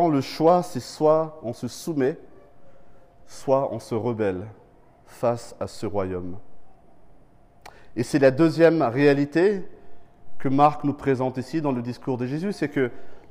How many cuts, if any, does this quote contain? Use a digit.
0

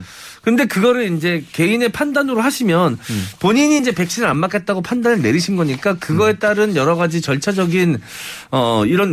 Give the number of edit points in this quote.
0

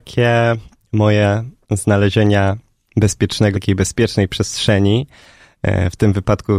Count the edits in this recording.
2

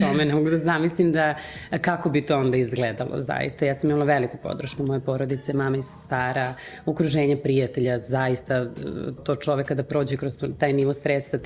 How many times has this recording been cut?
1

